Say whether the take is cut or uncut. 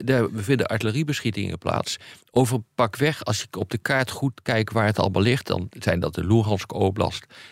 uncut